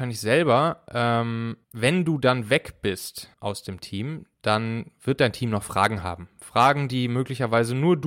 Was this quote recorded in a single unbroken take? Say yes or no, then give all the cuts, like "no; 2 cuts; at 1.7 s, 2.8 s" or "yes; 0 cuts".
no; 3 cuts; at 1.6 s, 3.3 s, 4.3 s